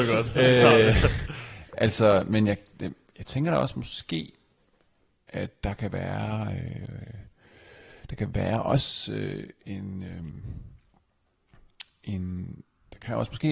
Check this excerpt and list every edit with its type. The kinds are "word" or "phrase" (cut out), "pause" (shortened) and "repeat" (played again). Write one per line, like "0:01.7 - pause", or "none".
none